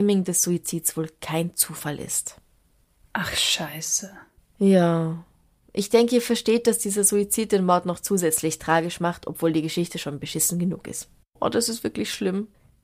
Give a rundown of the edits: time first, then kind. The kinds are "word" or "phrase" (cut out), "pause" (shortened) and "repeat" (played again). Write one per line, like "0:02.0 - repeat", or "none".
none